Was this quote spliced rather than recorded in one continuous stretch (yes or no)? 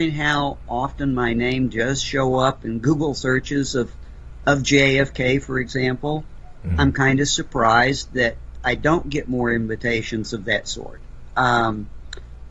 no